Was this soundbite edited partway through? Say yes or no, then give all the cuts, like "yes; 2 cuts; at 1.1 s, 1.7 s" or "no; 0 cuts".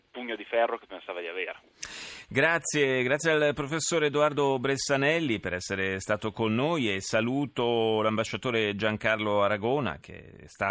no; 0 cuts